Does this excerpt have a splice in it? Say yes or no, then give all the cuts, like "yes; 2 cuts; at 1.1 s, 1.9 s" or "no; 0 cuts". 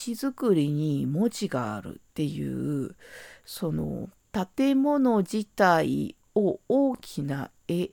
yes; 1 cut; at 2.1 s